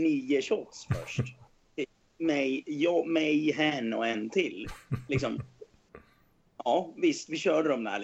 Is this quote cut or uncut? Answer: uncut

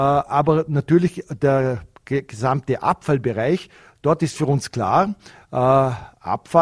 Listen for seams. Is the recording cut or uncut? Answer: uncut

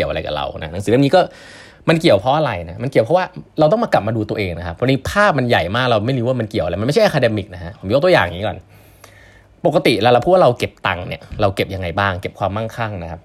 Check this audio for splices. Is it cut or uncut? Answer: uncut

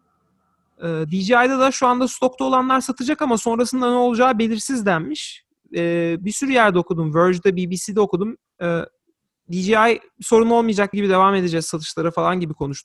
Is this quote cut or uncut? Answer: cut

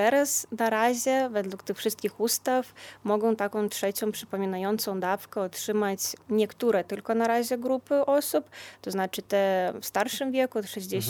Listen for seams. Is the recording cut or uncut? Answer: uncut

